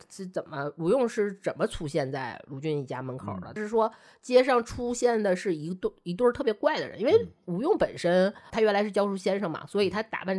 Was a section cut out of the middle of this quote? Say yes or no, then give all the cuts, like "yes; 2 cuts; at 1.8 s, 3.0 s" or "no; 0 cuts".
yes; 2 cuts; at 3.6 s, 8.5 s